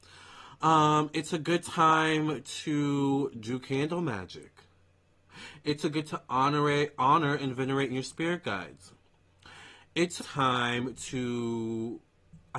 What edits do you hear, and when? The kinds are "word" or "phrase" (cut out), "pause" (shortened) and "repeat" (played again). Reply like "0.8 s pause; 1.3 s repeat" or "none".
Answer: 6.0 s word; 7.9 s phrase; 10.2 s phrase